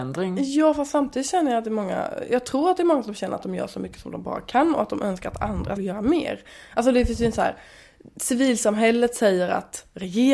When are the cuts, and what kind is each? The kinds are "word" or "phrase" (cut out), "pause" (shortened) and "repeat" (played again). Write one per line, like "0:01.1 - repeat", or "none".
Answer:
0:05.8 - word